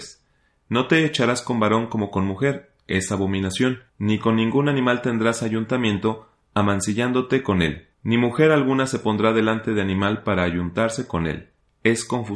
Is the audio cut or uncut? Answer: cut